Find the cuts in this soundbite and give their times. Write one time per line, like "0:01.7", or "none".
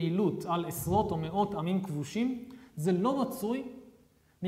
none